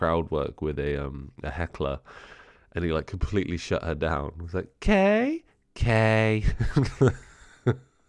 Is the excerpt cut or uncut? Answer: uncut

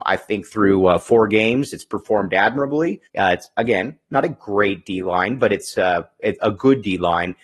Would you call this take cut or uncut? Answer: cut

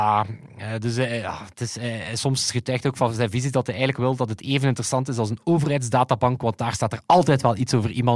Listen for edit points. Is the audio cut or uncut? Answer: uncut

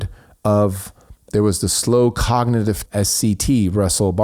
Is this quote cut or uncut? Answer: cut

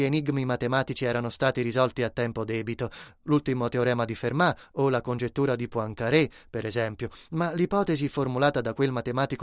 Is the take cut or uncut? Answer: uncut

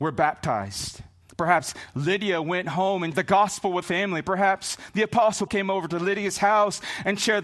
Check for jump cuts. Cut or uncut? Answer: cut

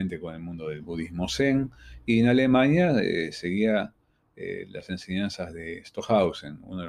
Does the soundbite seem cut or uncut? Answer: uncut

